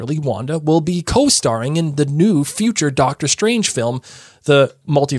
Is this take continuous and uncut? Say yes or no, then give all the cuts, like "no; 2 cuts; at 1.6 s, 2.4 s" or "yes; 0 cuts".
yes; 0 cuts